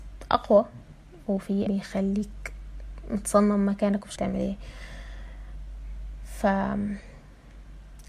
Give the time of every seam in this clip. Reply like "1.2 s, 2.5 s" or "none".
1.7 s, 4.2 s